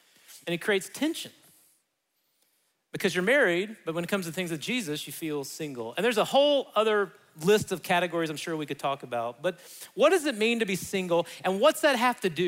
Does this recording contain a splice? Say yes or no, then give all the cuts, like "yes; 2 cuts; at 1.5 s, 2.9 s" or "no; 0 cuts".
no; 0 cuts